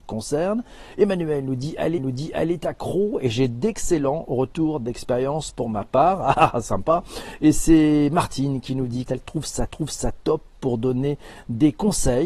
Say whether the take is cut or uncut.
cut